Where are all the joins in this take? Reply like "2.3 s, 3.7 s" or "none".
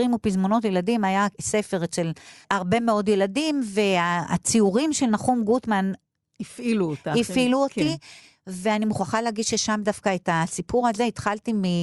none